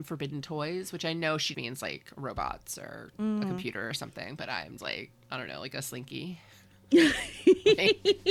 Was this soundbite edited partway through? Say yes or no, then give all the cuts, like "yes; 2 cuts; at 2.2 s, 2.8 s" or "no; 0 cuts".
yes; 2 cuts; at 1.5 s, 4.8 s